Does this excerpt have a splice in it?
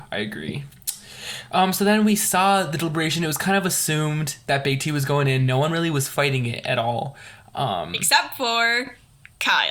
no; 0 cuts

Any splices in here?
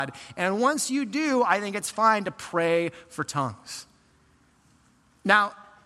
no; 0 cuts

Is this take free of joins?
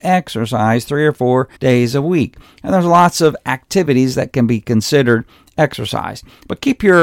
no; 1 cut; at 1.6 s

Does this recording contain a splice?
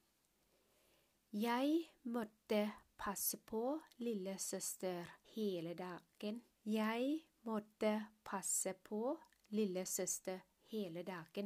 yes; 2 cuts; at 5.2 s, 6.5 s

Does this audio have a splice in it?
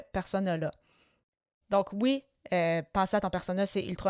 no; 0 cuts

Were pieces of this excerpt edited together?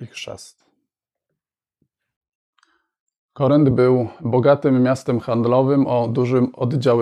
no; 0 cuts

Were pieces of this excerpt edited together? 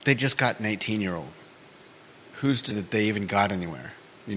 yes; 2 cuts; at 1.9 s, 2.7 s

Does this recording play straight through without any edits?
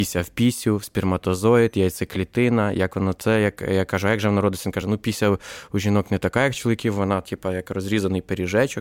yes; 0 cuts

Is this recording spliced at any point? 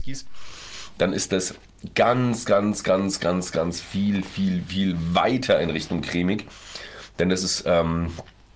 no; 0 cuts

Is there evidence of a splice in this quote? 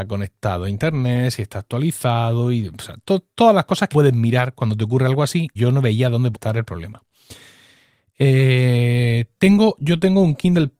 yes; 3 cuts; at 3.9 s, 5.6 s, 6.3 s

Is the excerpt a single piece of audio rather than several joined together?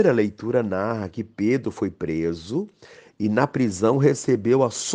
yes; 0 cuts

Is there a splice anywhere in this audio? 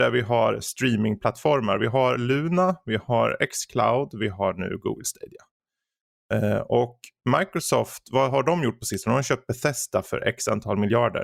no; 0 cuts

